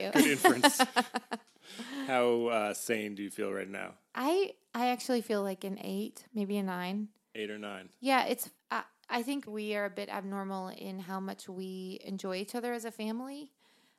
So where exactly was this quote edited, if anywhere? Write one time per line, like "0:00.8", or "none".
0:08.6
0:09.5